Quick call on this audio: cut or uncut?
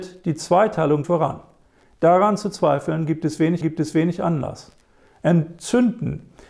cut